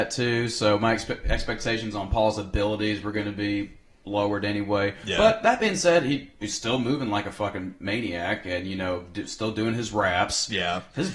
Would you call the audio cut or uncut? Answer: uncut